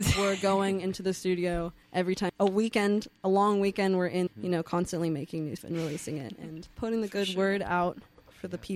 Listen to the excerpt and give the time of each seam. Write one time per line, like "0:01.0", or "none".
0:01.8
0:02.3
0:04.3
0:05.6
0:06.7